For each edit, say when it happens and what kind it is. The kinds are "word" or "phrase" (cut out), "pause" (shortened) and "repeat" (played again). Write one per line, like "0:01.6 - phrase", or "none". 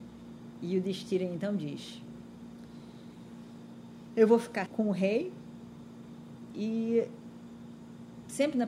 0:04.7 - word